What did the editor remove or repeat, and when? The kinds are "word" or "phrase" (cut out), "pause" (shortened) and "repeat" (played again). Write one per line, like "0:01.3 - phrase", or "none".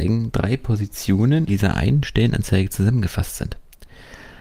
0:01.5 - word

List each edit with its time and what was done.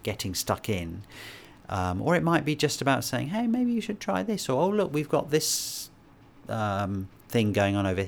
none

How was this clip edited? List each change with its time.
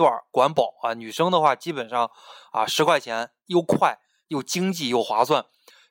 none

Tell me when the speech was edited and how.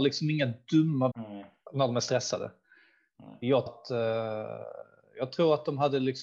0:01.1 - word
0:03.7 - word

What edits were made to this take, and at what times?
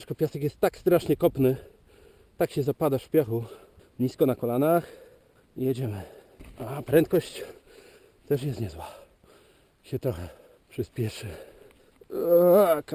none

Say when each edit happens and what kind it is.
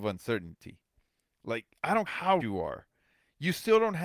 0:02.1 - word
0:02.4 - word

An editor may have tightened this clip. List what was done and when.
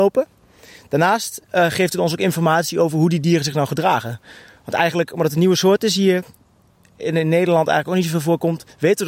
none

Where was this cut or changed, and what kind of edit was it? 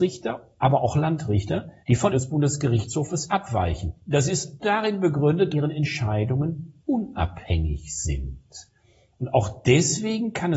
0:01.8 - pause
0:02.1 - word
0:04.0 - pause
0:04.6 - word
0:05.5 - phrase
0:06.8 - pause

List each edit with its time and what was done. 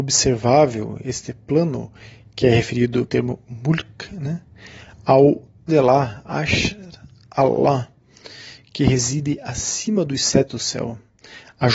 0:03.1 - word
0:05.7 - word
0:10.5 - word

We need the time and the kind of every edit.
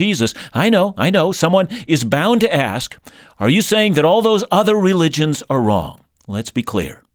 none

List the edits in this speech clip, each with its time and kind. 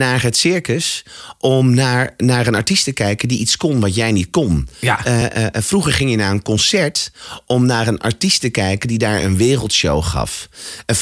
none

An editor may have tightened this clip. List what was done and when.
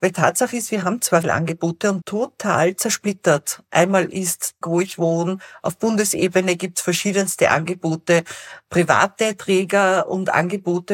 0:01.2 - word
0:02.0 - phrase
0:04.6 - phrase

